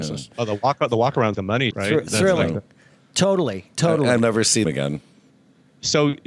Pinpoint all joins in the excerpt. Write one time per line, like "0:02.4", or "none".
0:01.3
0:01.7
0:04.2
0:04.6

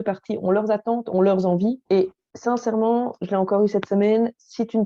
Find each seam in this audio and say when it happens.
0:01.9

